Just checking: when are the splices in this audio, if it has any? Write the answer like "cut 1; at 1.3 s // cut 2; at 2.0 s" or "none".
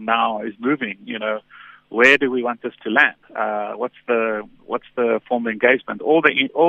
cut 1; at 3.2 s

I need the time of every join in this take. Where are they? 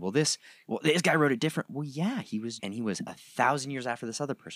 cut 1; at 2.6 s

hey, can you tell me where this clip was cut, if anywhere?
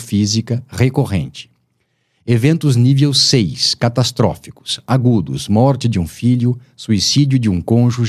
none

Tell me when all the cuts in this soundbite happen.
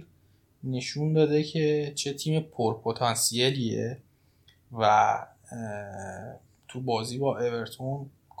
cut 1; at 6.5 s

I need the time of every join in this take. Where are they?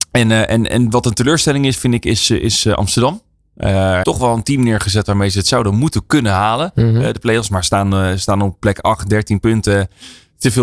cut 1; at 4.0 s

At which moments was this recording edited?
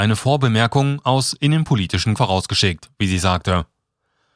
cut 1; at 2.2 s

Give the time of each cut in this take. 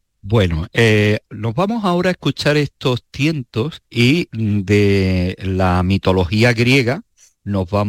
cut 1; at 3.8 s

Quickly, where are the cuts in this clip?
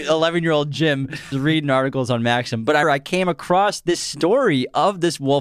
cut 1; at 1.3 s // cut 2; at 2.8 s

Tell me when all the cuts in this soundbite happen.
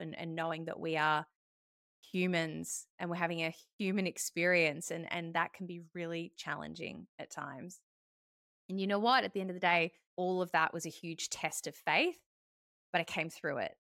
cut 1; at 2.9 s // cut 2; at 10.1 s

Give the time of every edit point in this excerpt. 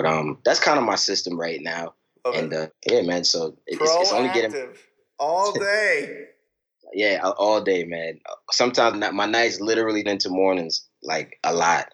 cut 1; at 2.7 s // cut 2; at 8.9 s // cut 3; at 10.1 s

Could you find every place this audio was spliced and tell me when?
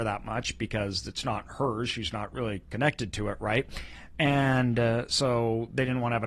none

